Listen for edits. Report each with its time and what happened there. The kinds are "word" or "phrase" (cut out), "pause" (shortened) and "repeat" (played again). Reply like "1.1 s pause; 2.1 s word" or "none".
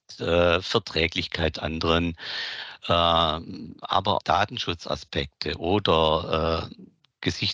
1.5 s phrase; 4.2 s word